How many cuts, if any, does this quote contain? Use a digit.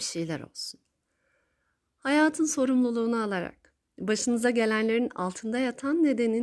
0